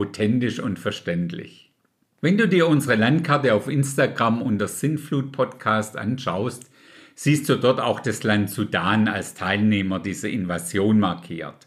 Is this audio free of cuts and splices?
yes; 0 cuts

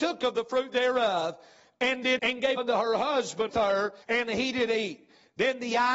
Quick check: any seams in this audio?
yes; 4 cuts; at 2.2 s, 2.6 s, 3.5 s, 4.0 s

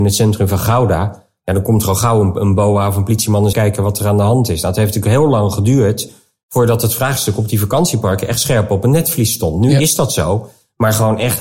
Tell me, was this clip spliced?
yes; 1 cut; at 3.5 s

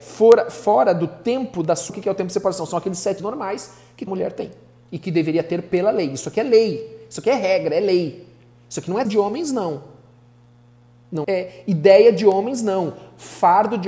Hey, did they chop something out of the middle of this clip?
yes; 5 cuts; at 1.9 s, 3.2 s, 4.1 s, 9.0 s, 11.2 s

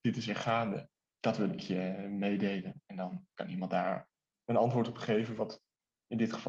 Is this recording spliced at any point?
no; 0 cuts

